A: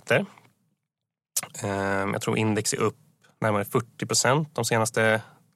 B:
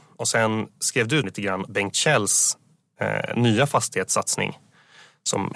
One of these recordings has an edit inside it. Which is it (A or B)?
B